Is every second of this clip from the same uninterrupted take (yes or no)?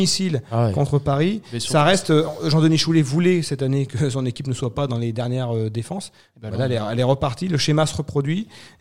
yes